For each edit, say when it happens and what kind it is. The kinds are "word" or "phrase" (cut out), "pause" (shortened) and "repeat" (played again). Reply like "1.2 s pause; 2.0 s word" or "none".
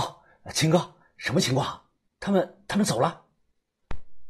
none